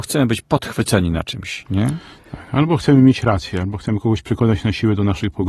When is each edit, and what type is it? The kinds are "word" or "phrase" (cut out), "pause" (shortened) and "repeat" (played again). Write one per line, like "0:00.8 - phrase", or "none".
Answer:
none